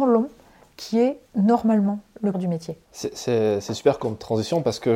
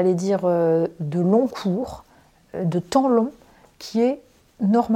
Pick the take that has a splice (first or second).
first